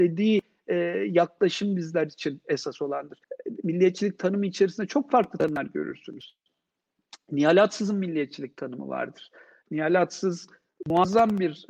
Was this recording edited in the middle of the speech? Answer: yes; 1 cut; at 3.2 s

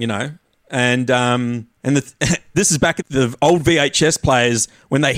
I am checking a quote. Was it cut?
yes; 3 cuts; at 1.7 s, 2.5 s, 3.0 s

